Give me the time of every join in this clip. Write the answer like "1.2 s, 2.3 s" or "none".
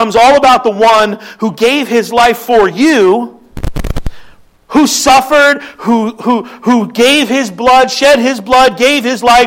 none

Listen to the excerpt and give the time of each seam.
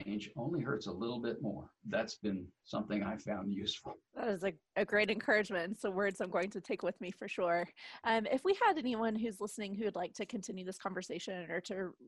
1.8 s, 2.6 s, 4.0 s

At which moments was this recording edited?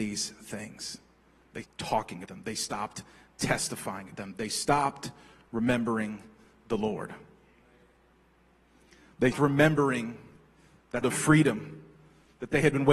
1.6 s, 2.2 s, 4.1 s, 9.3 s, 11.0 s

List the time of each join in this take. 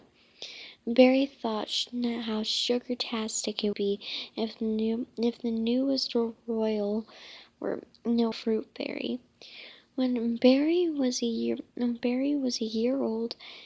3.7 s, 8.3 s

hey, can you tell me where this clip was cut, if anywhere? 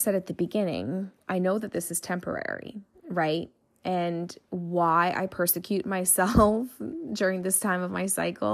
none

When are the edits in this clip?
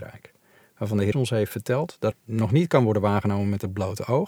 1.1 s, 2.1 s

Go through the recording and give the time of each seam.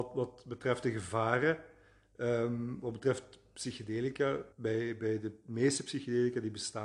4.5 s

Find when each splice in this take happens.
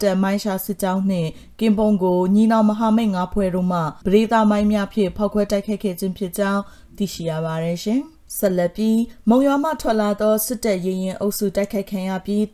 4.0 s, 8.3 s

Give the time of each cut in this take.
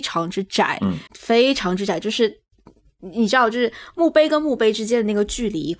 1.1 s

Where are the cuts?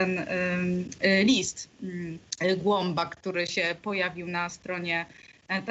none

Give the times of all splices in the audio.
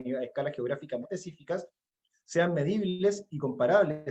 1.0 s

